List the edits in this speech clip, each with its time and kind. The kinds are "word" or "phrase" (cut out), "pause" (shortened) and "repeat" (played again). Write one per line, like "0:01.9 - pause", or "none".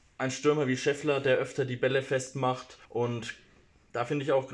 0:02.8 - pause